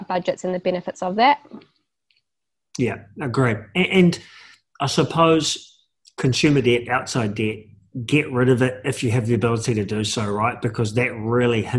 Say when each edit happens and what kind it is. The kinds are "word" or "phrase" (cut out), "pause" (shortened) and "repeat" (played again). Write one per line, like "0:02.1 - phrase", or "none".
none